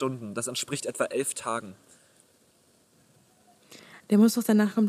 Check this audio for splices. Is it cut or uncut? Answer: uncut